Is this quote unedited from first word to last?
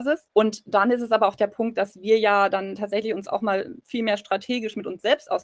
yes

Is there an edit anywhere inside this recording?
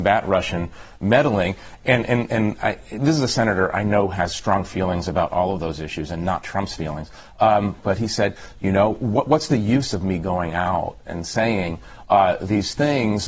yes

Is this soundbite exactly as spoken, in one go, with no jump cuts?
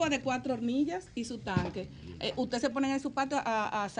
no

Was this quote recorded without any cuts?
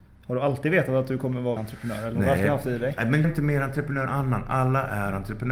no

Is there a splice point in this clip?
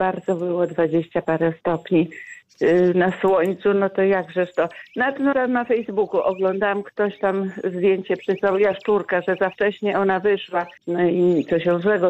yes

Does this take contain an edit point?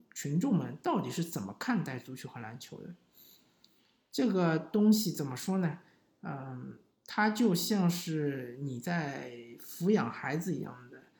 no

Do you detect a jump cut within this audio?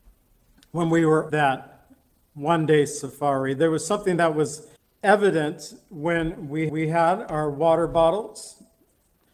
yes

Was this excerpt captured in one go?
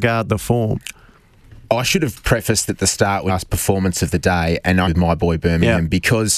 no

